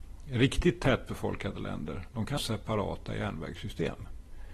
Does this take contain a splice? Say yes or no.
yes